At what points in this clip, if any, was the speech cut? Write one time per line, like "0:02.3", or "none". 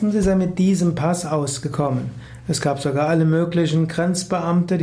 none